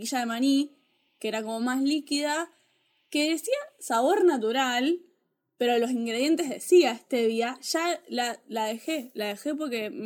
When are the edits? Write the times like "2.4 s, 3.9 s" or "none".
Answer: none